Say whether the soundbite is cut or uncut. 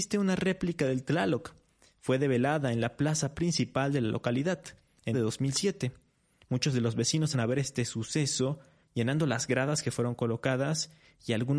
cut